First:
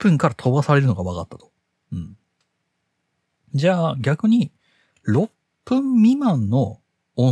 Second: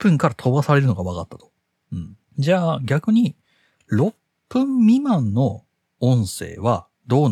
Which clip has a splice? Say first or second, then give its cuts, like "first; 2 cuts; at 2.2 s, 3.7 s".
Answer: second; 1 cut; at 2.2 s